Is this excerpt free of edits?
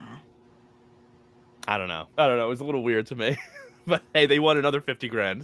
no; 1 cut; at 2.1 s

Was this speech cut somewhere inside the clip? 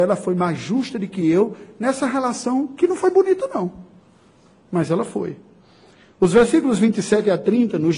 no; 0 cuts

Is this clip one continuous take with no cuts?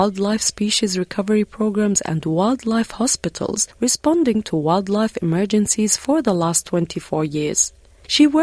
no; 1 cut; at 3.7 s

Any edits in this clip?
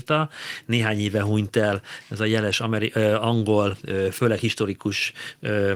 no; 0 cuts

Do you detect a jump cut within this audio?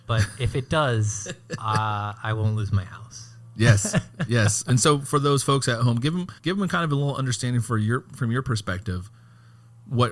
yes; 1 cut; at 6.4 s

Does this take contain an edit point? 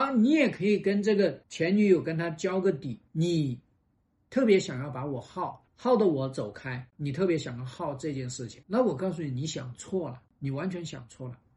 yes; 6 cuts; at 1.4 s, 3.1 s, 5.7 s, 6.9 s, 8.6 s, 10.3 s

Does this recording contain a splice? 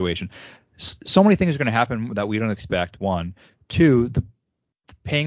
no; 0 cuts

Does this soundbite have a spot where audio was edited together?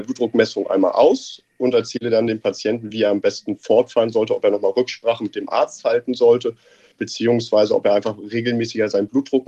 no; 0 cuts

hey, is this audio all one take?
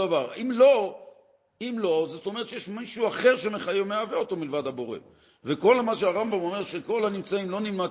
yes; 0 cuts

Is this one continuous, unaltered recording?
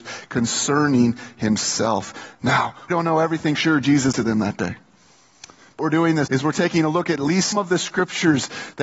no; 6 cuts; at 2.9 s, 3.6 s, 4.1 s, 5.8 s, 6.3 s, 7.5 s

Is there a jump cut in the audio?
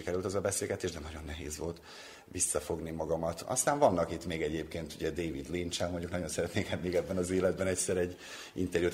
no; 0 cuts

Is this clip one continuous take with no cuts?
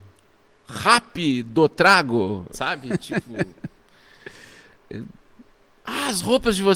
no; 1 cut; at 2.5 s

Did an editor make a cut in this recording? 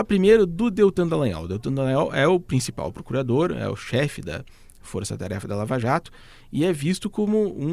no; 0 cuts

